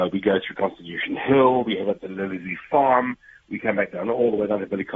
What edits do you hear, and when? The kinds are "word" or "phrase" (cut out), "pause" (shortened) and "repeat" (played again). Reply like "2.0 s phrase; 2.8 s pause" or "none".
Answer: none

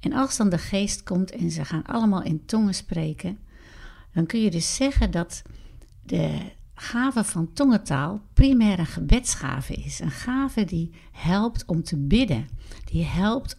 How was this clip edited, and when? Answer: 5.9 s pause

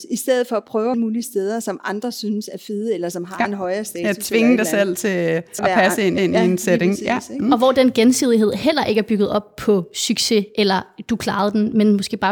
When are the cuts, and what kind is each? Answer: 0.9 s phrase; 5.6 s word; 6.2 s repeat

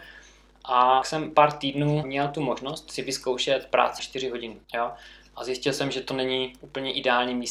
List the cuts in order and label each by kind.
1.0 s word; 2.0 s word; 4.0 s word; 4.6 s pause

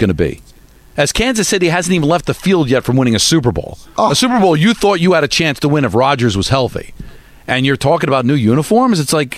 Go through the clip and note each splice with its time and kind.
none

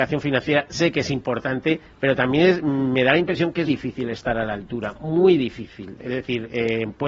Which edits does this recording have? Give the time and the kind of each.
3.7 s word

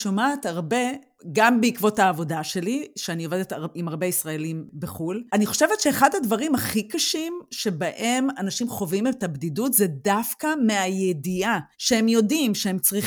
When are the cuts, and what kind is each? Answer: 5.3 s pause; 11.7 s pause

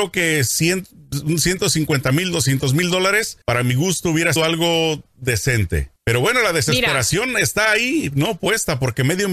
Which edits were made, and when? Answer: 3.4 s pause; 4.4 s word; 6.0 s pause

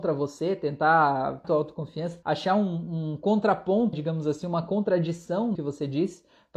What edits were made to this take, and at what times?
1.4 s phrase; 2.2 s word; 3.9 s word; 5.5 s word

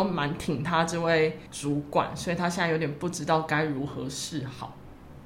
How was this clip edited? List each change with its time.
1.5 s pause

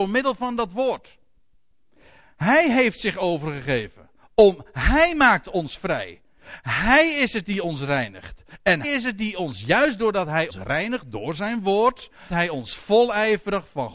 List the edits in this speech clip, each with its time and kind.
8.8 s word; 10.5 s word; 12.3 s word

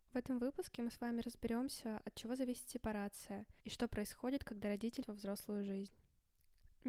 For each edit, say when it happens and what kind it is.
3.6 s pause; 5.0 s phrase

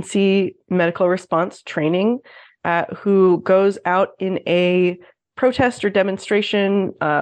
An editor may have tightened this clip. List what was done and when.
none

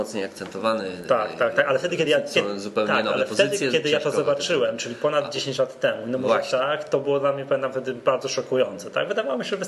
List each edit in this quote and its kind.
none

